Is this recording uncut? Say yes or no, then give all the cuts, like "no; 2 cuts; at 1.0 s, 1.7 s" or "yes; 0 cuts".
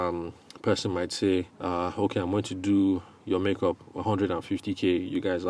no; 1 cut; at 1.5 s